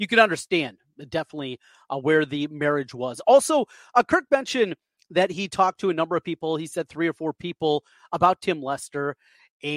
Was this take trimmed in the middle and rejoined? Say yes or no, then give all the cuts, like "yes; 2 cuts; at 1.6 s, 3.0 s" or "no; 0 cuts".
no; 0 cuts